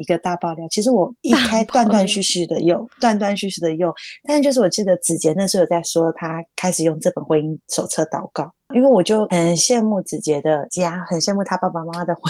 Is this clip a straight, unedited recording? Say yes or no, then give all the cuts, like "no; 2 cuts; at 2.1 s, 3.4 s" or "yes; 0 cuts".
no; 3 cuts; at 1.2 s, 5.8 s, 7.6 s